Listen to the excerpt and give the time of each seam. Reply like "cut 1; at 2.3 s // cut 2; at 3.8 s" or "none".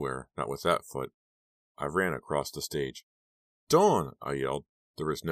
none